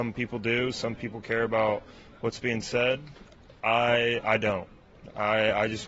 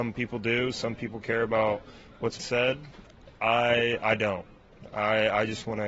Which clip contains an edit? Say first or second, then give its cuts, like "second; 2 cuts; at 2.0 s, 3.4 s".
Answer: second; 1 cut; at 2.4 s